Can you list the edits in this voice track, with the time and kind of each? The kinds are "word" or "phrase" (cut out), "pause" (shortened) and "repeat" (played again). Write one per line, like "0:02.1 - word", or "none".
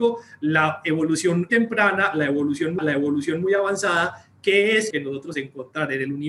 0:01.5 - word
0:02.8 - repeat
0:04.9 - word
0:05.3 - word